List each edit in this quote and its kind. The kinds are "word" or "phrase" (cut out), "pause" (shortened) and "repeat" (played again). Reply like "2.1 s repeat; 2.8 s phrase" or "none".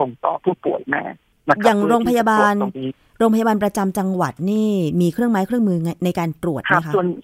none